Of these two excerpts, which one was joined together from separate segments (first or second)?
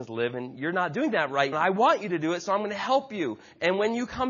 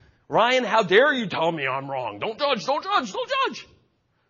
first